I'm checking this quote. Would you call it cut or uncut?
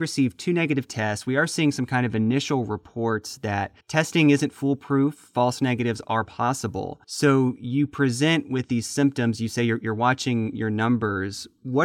cut